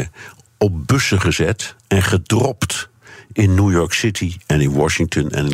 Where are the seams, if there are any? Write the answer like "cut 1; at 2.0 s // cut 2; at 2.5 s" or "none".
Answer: none